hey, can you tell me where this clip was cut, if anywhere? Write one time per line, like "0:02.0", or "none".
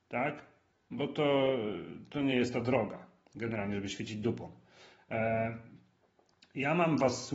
none